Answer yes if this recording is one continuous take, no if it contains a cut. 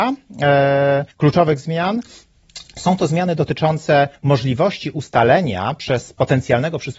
no